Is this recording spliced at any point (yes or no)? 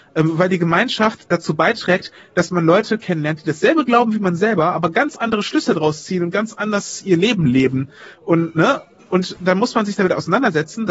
no